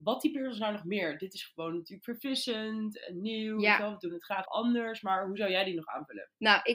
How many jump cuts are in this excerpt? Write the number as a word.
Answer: one